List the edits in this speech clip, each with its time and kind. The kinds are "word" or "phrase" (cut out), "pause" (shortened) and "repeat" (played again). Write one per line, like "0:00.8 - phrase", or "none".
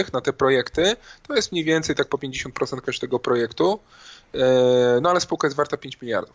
none